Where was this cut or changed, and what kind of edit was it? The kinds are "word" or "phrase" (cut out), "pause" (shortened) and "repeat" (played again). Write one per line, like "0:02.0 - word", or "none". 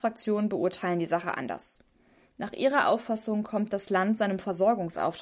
none